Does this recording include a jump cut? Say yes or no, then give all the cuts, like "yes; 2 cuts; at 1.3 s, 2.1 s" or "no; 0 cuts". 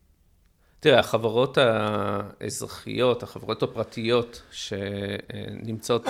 no; 0 cuts